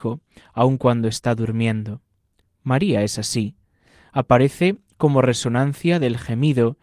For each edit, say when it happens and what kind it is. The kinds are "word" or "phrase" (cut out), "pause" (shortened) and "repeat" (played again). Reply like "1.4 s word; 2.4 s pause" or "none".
none